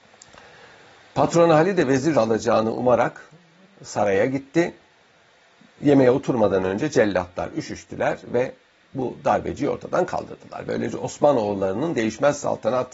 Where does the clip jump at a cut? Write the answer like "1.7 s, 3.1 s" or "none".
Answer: 2.1 s

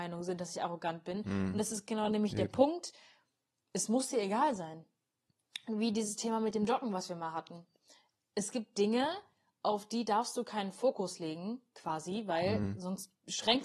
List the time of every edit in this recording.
none

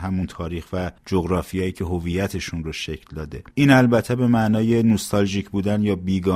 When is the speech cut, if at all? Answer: 1.0 s, 3.5 s

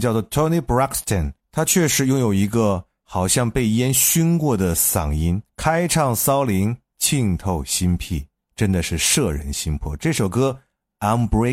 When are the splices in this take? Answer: 1.4 s, 5.5 s

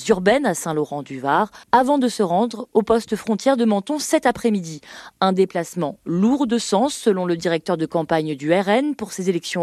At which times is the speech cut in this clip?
1.6 s

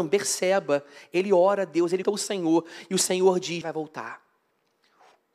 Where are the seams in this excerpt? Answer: 2.0 s, 3.6 s

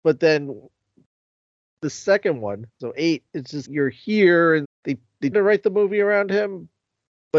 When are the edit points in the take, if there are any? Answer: 2.7 s, 3.3 s, 3.6 s, 4.6 s, 5.3 s

